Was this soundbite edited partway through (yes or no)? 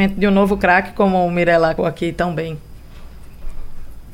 yes